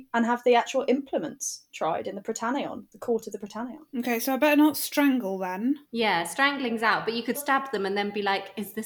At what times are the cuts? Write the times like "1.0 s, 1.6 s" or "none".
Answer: 3.9 s, 5.8 s, 7.3 s